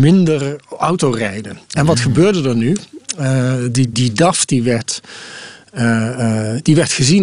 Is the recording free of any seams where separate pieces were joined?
no; 1 cut; at 3.9 s

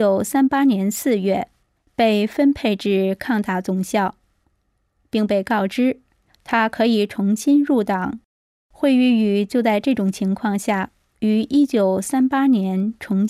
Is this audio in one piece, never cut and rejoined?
yes; 0 cuts

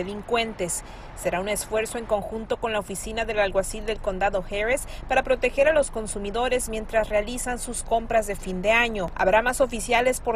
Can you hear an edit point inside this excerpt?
no; 0 cuts

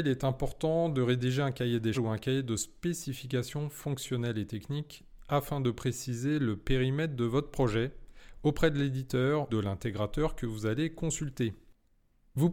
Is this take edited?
yes; 2 cuts; at 1.9 s, 9.5 s

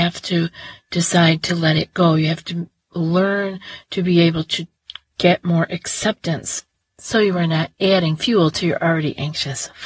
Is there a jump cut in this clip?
no; 0 cuts

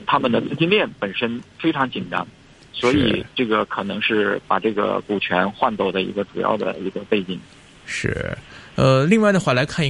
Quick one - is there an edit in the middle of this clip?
no; 0 cuts

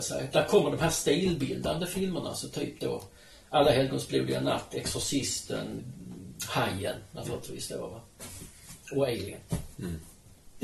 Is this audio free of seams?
no; 1 cut; at 5.8 s

